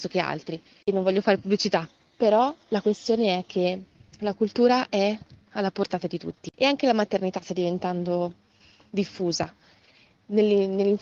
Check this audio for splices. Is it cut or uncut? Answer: uncut